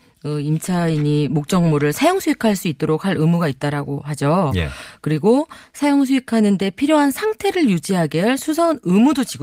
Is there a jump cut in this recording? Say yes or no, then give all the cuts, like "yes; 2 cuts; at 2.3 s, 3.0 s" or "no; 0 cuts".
no; 0 cuts